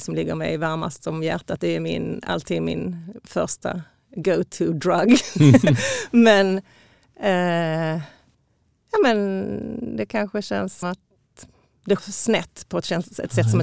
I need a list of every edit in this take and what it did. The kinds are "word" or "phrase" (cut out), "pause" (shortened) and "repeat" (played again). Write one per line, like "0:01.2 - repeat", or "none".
0:10.8 - word
0:12.0 - word